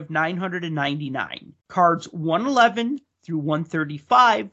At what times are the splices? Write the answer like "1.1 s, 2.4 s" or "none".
1.6 s